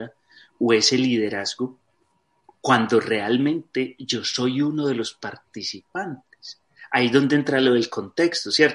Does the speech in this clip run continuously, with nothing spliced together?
yes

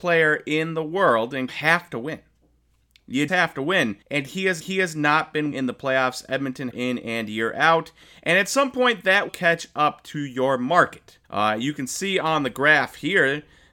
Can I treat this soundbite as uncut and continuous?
no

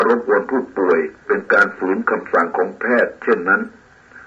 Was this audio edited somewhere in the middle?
yes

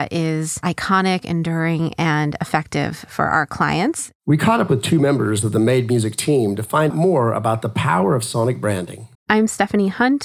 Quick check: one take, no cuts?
no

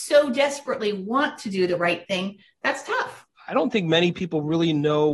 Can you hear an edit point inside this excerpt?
yes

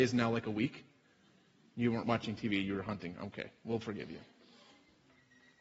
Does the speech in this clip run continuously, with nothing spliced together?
yes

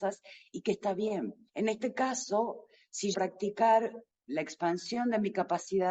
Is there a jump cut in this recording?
yes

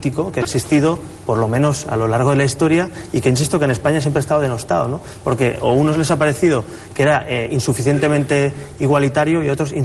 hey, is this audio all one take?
yes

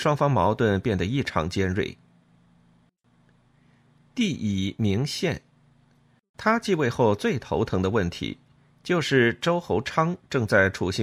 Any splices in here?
no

